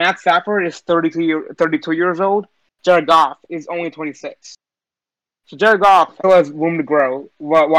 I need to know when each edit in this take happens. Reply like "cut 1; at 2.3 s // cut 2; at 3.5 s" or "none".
cut 1; at 6.2 s